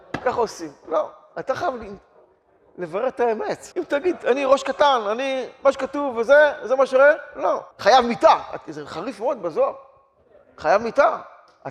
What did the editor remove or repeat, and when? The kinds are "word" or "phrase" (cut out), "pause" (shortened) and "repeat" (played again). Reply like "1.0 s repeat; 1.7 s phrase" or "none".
3.7 s pause; 7.7 s pause